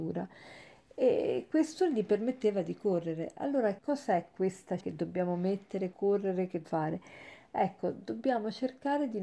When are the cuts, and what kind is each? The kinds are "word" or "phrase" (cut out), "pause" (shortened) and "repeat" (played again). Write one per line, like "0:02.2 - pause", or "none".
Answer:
0:03.8 - word
0:04.8 - word
0:05.9 - word
0:06.6 - word